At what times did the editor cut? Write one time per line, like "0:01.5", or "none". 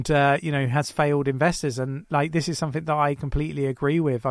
none

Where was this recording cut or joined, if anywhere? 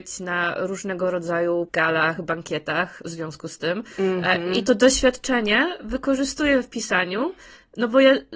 0:01.7

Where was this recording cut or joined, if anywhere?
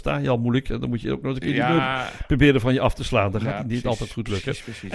none

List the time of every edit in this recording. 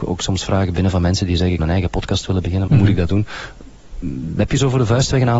0:01.6
0:02.7

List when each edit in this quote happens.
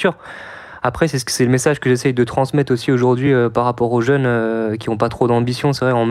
none

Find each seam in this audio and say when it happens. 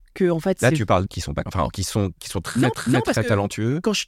0:01.1
0:01.5
0:02.7

